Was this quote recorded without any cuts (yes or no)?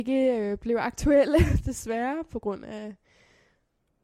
yes